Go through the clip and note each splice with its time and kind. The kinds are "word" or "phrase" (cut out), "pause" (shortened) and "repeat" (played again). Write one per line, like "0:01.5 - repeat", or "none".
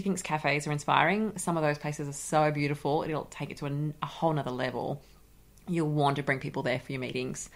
none